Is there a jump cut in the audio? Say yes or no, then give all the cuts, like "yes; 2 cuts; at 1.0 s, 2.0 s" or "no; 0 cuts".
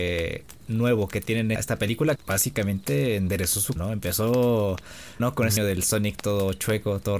yes; 5 cuts; at 1.6 s, 2.2 s, 3.8 s, 5.2 s, 5.6 s